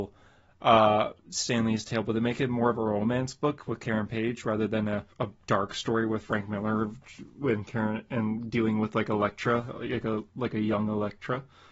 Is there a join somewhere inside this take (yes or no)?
yes